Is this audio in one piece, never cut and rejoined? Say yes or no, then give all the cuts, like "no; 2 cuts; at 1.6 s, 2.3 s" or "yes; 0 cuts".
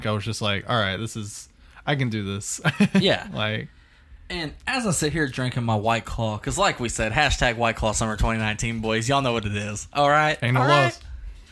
yes; 0 cuts